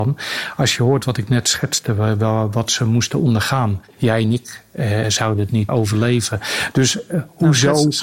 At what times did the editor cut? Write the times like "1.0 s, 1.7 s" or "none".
3.9 s, 5.0 s, 5.7 s